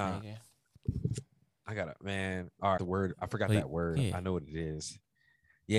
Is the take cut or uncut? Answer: cut